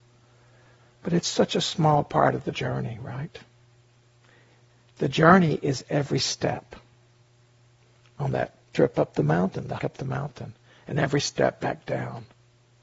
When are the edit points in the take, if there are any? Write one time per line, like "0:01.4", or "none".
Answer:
0:08.6
0:09.8